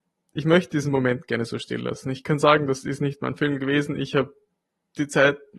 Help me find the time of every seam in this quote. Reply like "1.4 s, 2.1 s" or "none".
none